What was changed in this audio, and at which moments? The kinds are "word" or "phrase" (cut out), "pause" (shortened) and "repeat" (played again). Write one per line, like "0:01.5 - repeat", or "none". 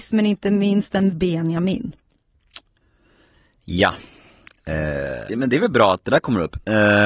0:01.1 - word
0:05.3 - word